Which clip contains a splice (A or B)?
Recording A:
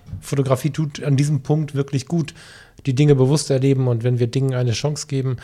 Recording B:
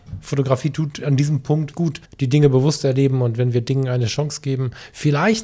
B